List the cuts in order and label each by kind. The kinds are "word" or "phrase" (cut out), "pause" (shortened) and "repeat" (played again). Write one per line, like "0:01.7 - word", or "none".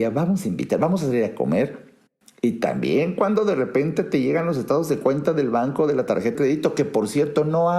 0:06.3 - word